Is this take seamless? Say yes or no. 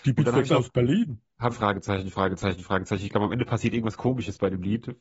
no